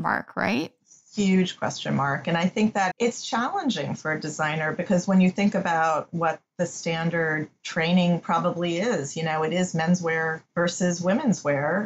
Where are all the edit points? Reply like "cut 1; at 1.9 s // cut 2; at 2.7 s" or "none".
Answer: cut 1; at 2.9 s // cut 2; at 10.5 s